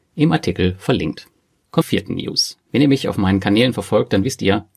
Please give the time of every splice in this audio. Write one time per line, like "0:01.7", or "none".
0:01.8